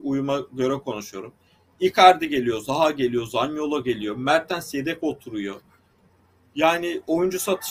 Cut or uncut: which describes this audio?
uncut